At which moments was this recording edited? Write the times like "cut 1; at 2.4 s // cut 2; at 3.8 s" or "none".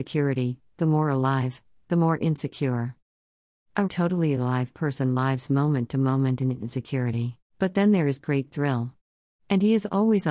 cut 1; at 3.9 s // cut 2; at 7.4 s